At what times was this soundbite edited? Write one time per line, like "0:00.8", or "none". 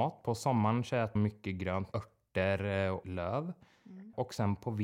0:01.2
0:01.9
0:03.0